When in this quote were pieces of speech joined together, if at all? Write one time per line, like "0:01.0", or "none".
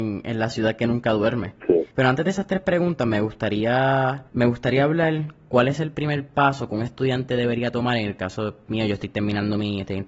0:01.9
0:04.3

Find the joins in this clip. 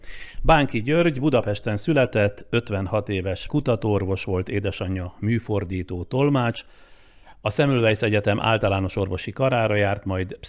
0:03.5

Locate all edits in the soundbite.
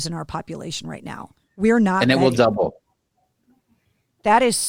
0:01.4

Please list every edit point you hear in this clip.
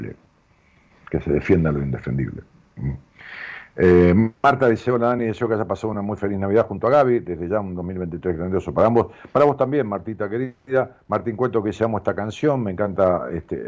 none

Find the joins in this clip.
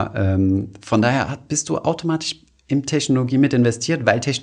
none

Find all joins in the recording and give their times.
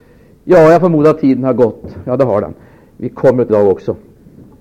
0:03.5

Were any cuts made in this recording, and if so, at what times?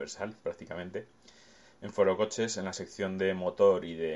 none

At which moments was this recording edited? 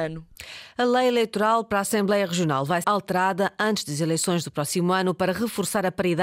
0:02.8

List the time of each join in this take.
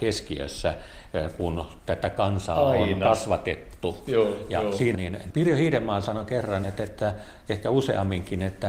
0:04.9
0:06.6

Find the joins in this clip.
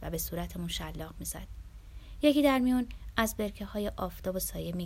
none

